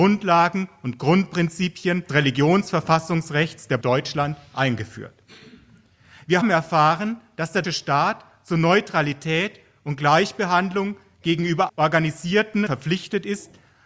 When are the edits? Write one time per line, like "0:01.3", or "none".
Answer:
0:02.1
0:03.8
0:06.4
0:07.6
0:11.7
0:12.7